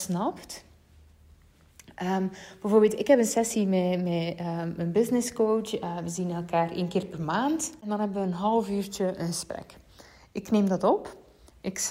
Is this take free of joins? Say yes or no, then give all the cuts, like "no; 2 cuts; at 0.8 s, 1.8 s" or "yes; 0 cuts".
yes; 0 cuts